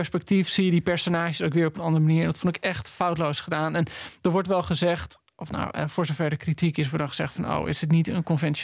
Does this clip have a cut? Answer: no; 0 cuts

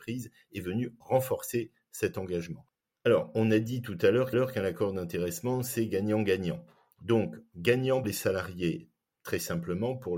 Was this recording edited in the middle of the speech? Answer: yes; 2 cuts; at 4.3 s, 8.0 s

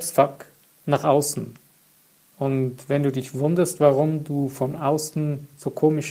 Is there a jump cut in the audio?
no; 0 cuts

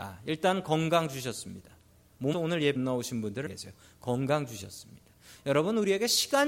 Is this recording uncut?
no; 3 cuts; at 2.3 s, 2.8 s, 3.5 s

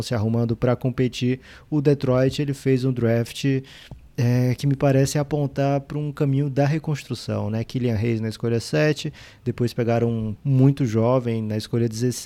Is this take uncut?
no; 1 cut; at 10.4 s

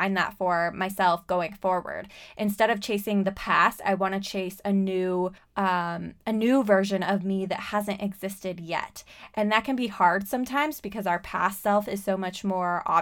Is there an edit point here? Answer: yes; 1 cut; at 5.4 s

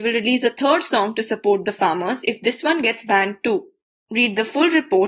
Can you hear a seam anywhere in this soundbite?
no; 0 cuts

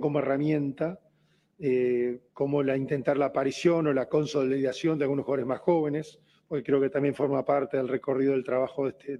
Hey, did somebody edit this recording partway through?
yes; 2 cuts; at 2.3 s, 6.3 s

